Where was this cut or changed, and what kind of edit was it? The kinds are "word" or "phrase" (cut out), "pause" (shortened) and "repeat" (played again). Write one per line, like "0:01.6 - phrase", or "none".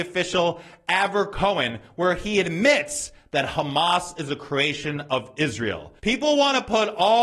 0:06.0 - pause